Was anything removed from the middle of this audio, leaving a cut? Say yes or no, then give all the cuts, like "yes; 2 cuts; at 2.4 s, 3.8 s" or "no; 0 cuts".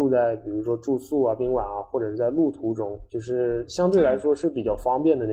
yes; 1 cut; at 3.1 s